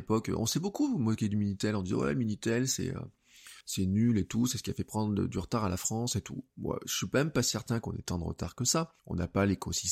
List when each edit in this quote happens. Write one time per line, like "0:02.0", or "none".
0:03.6
0:09.0